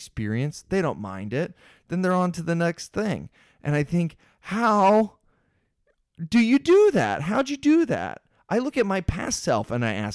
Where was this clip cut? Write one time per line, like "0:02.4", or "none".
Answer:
none